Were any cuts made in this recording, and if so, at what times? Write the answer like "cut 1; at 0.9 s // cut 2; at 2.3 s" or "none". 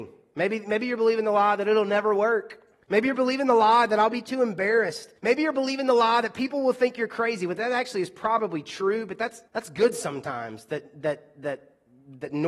cut 1; at 2.8 s // cut 2; at 5.2 s // cut 3; at 9.5 s

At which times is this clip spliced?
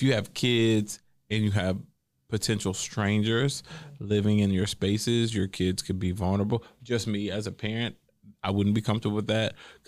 none

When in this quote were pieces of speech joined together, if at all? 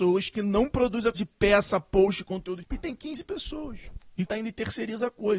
cut 1; at 1.1 s // cut 2; at 2.6 s // cut 3; at 4.3 s

